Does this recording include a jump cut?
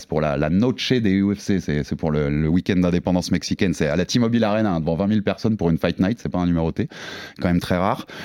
no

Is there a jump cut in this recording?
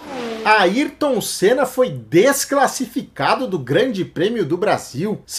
no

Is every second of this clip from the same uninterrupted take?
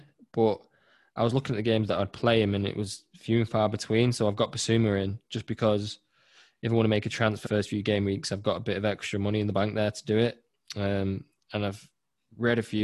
no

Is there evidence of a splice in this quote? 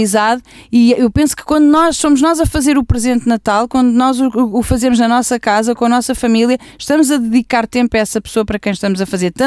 no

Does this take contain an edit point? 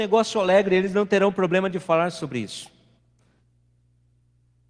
no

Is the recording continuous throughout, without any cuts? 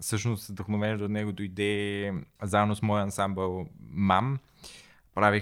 yes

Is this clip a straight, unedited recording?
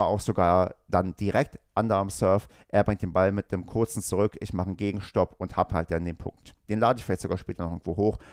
yes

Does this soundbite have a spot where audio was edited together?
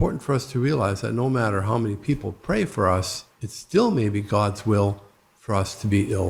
yes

